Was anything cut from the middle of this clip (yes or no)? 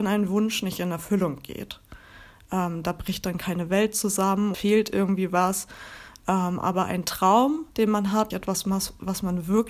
yes